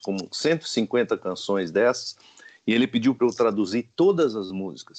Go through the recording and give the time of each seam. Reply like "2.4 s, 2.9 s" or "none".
none